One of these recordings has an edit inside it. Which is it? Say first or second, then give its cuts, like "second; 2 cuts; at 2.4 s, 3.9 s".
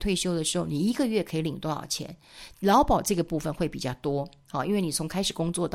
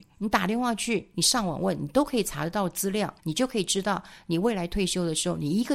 second; 1 cut; at 3.2 s